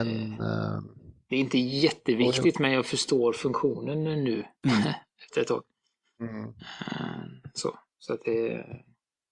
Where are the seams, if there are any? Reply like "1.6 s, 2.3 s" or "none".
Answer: none

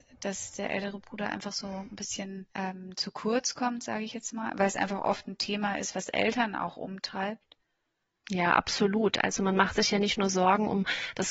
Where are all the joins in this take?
2.5 s

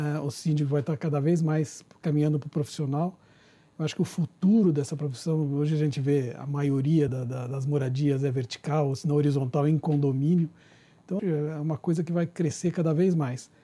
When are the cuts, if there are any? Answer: 7.1 s, 11.2 s

